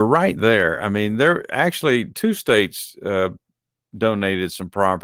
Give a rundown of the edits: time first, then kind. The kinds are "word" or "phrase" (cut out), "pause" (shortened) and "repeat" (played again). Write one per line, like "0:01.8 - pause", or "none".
none